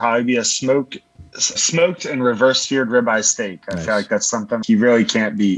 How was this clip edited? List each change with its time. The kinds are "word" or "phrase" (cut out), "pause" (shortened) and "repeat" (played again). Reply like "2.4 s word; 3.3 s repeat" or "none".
1.6 s word; 4.6 s word

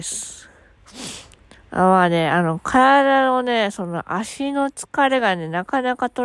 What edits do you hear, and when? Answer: none

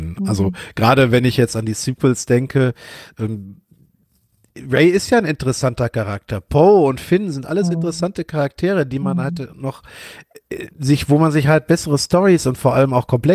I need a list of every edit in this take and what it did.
10.7 s pause

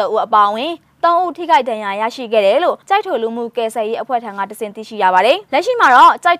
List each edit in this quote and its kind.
2.8 s pause

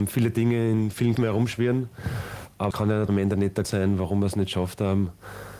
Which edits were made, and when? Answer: 1.2 s word; 2.7 s word; 3.1 s word; 3.6 s word

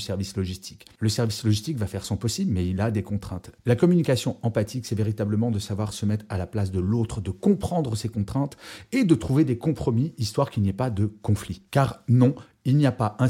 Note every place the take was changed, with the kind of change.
11.7 s pause

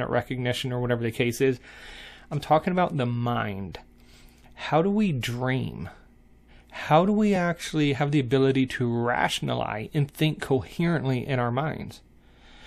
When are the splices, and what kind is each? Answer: none

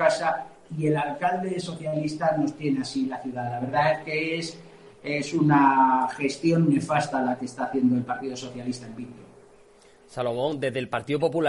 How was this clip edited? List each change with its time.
none

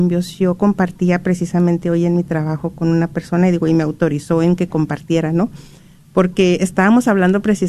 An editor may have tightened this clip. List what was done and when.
none

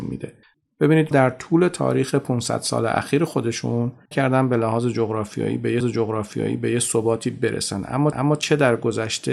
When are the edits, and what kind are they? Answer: 1.1 s word; 4.1 s phrase; 5.8 s repeat; 8.1 s repeat

